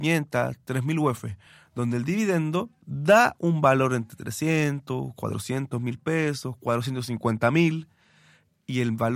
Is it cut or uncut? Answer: uncut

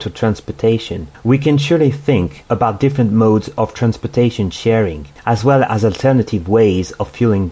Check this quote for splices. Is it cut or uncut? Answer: uncut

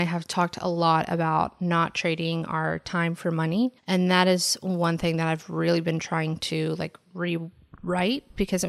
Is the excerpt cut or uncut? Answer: cut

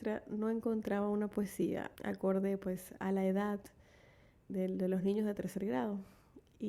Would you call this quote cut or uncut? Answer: cut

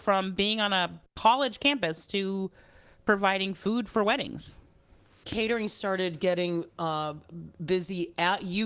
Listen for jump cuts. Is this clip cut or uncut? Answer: uncut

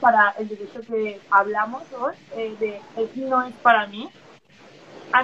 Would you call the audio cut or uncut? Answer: cut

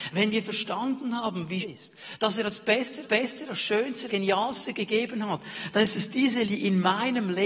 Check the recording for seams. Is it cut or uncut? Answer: cut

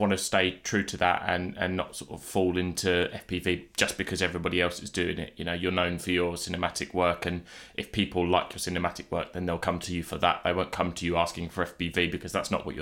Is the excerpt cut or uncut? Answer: uncut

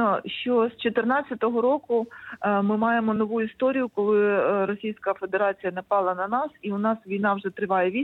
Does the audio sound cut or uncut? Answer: uncut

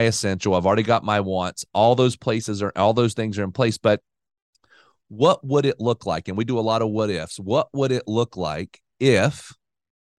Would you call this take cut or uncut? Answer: uncut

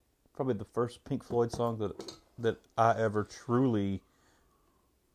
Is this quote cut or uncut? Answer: uncut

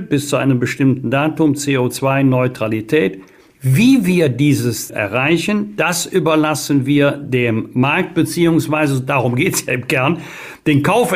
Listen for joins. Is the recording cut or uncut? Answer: cut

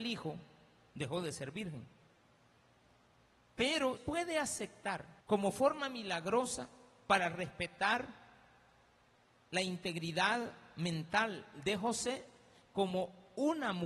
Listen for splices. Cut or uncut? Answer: cut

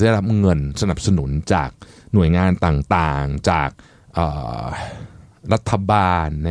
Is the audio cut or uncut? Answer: uncut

